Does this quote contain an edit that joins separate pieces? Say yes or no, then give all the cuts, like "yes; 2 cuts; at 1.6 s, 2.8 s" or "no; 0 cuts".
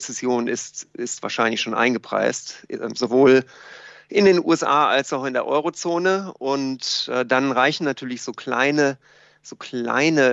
no; 0 cuts